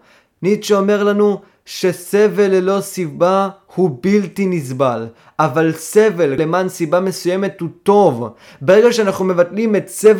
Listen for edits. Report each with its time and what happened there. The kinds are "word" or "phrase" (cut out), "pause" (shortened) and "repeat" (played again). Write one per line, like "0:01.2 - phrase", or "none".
none